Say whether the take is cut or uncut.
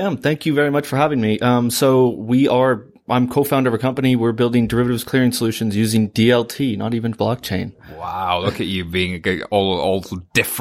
uncut